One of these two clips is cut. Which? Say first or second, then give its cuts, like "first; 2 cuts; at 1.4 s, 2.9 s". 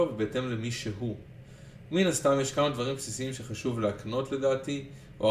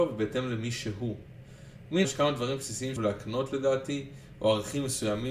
second; 2 cuts; at 2.0 s, 3.0 s